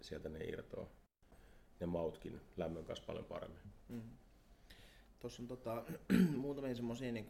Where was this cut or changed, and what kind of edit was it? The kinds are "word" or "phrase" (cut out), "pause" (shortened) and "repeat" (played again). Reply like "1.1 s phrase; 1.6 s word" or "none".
none